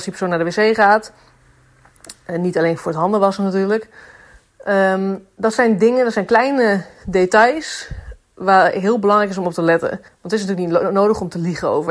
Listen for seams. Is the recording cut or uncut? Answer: cut